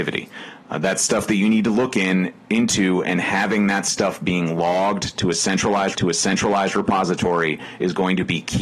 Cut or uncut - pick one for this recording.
cut